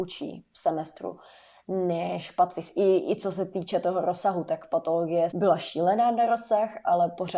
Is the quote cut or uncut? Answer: cut